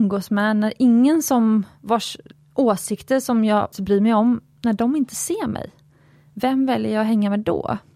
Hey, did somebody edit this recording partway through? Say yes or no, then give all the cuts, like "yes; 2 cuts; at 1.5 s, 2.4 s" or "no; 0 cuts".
yes; 1 cut; at 3.7 s